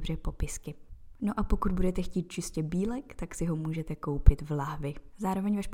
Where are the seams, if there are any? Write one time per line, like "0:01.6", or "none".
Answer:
none